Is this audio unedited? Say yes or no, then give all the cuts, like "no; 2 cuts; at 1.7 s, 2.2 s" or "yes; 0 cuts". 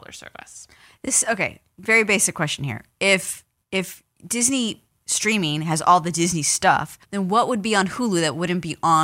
no; 2 cuts; at 3.6 s, 7.0 s